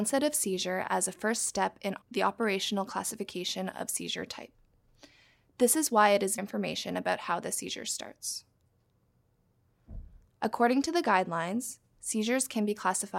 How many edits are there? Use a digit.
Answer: 2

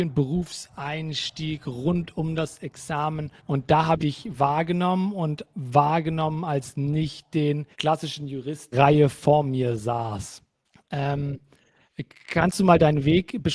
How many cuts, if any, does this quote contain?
6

